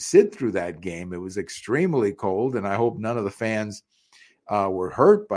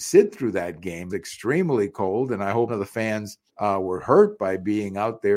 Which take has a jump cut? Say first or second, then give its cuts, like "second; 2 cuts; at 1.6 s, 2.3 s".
second; 3 cuts; at 1.1 s, 2.7 s, 3.5 s